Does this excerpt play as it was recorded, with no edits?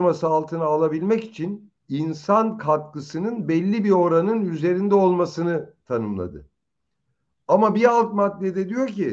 no; 1 cut; at 1.8 s

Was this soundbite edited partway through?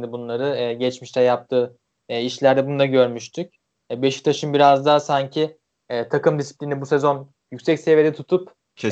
no; 0 cuts

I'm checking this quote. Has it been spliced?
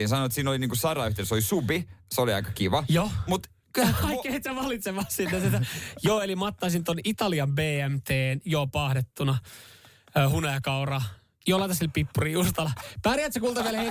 no; 0 cuts

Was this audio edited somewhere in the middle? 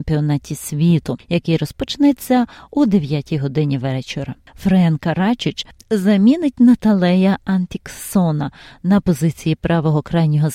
no; 0 cuts

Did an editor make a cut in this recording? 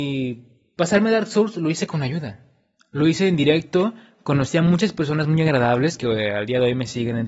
no; 0 cuts

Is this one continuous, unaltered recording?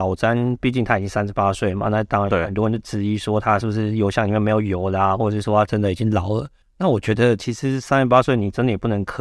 no; 1 cut; at 6.6 s

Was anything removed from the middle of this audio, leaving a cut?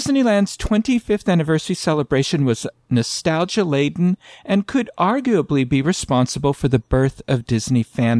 no; 0 cuts

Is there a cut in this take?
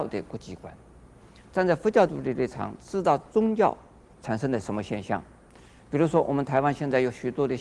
no; 0 cuts

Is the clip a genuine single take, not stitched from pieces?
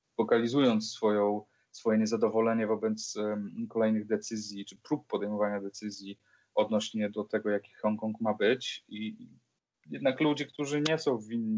yes; 0 cuts

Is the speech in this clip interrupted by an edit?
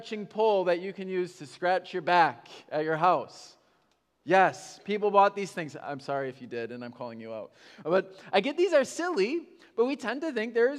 no; 0 cuts

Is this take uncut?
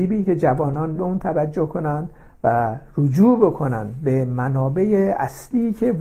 no; 1 cut; at 1.0 s

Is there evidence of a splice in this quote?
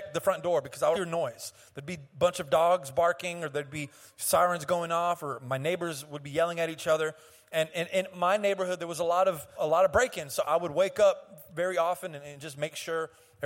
yes; 2 cuts; at 0.9 s, 9.5 s

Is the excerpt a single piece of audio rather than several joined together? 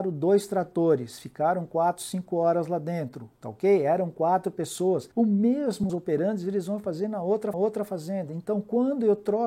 no; 4 cuts; at 3.3 s, 5.1 s, 5.9 s, 7.5 s

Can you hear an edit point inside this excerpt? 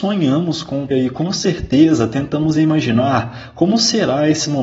yes; 1 cut; at 0.9 s

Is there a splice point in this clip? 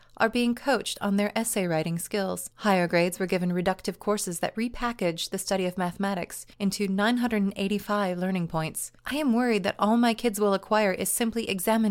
yes; 3 cuts; at 2.5 s, 6.5 s, 9.0 s

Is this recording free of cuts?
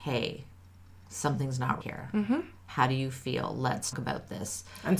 no; 2 cuts; at 1.8 s, 3.9 s

